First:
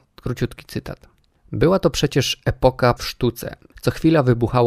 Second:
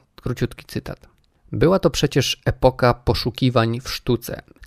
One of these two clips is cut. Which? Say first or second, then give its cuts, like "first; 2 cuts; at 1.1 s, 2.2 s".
first; 1 cut; at 3.0 s